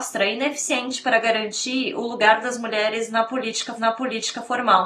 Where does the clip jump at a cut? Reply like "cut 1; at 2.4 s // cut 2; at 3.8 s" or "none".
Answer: cut 1; at 3.8 s